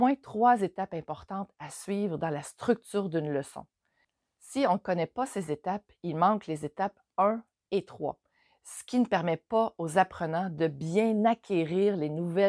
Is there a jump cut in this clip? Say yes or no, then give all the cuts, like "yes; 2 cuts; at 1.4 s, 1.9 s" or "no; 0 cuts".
no; 0 cuts